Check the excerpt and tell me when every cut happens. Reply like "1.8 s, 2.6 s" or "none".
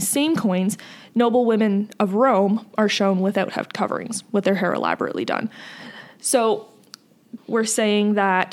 7.4 s